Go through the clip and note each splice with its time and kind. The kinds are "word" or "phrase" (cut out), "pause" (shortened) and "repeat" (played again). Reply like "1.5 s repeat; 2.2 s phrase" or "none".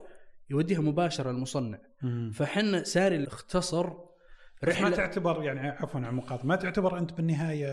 3.2 s phrase